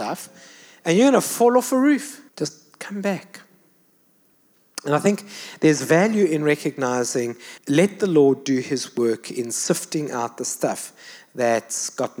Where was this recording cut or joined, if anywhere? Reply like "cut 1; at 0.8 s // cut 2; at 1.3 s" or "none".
cut 1; at 2.3 s // cut 2; at 7.6 s